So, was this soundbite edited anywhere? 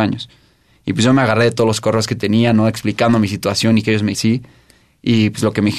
yes; 1 cut; at 4.1 s

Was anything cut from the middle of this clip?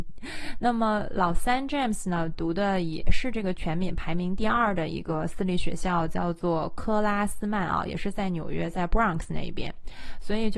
no; 0 cuts

